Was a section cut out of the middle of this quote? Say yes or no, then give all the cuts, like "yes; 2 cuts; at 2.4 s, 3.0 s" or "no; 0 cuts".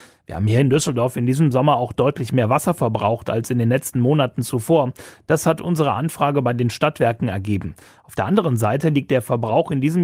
no; 0 cuts